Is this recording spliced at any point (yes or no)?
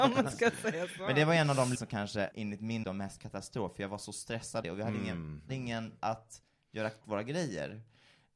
yes